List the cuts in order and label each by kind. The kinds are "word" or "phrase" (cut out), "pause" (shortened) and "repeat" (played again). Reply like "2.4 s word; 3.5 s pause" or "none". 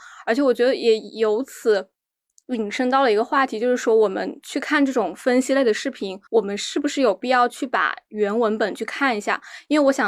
6.3 s pause